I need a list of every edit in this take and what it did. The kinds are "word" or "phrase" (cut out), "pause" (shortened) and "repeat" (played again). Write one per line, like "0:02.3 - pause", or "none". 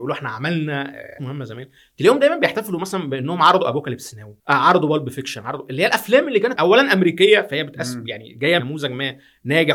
0:01.2 - word
0:04.4 - pause
0:06.6 - word
0:08.6 - word